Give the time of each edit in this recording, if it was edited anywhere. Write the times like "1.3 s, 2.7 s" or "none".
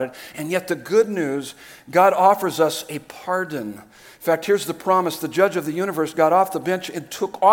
none